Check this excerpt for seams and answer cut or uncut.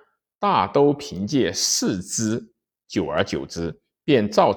uncut